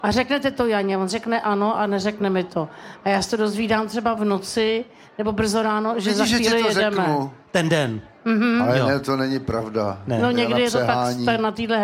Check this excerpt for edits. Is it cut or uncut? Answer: uncut